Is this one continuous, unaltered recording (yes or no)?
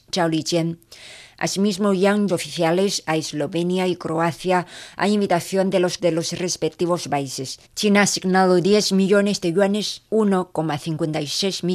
no